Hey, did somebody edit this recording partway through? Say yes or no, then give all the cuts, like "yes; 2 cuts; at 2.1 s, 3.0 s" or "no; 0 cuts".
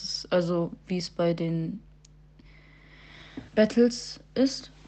yes; 1 cut; at 3.5 s